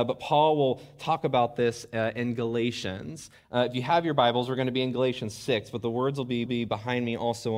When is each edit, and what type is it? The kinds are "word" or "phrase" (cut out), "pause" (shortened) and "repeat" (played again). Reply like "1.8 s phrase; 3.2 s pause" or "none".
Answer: 6.5 s repeat